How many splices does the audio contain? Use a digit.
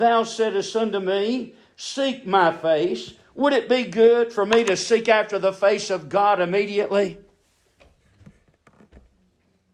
0